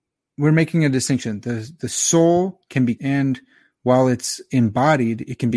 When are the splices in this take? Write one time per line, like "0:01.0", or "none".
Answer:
0:03.0